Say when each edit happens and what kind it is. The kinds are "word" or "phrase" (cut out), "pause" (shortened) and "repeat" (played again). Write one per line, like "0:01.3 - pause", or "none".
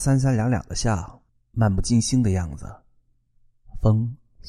0:01.3 - pause